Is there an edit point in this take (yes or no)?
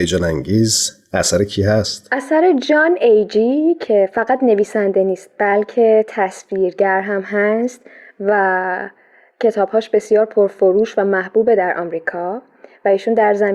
no